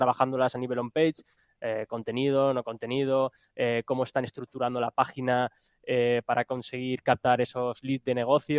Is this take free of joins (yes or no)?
yes